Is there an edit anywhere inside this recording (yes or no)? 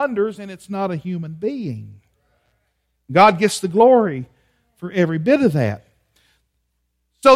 no